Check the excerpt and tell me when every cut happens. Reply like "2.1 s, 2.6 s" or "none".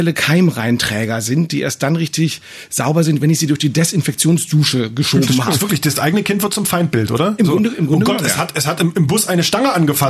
none